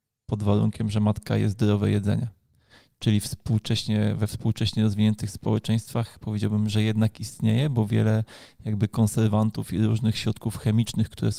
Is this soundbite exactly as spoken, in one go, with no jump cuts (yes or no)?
yes